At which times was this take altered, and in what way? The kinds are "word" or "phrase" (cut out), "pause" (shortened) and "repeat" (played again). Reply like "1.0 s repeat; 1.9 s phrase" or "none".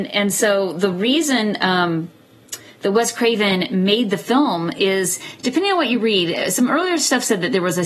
none